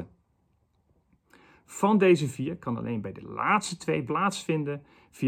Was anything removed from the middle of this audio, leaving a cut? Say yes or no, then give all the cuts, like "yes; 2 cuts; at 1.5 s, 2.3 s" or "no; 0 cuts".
yes; 1 cut; at 4.1 s